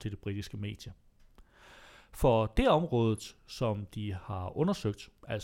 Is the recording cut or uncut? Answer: uncut